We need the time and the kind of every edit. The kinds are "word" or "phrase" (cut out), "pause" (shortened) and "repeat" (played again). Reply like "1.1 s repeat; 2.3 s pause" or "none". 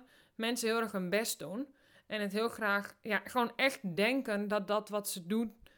none